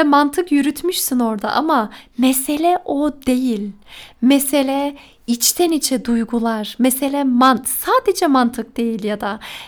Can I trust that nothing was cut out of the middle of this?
yes; 0 cuts

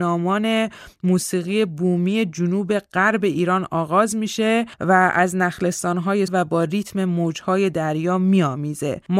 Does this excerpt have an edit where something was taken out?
yes; 1 cut; at 6.3 s

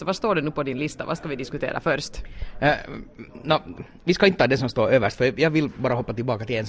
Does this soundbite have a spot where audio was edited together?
no; 0 cuts

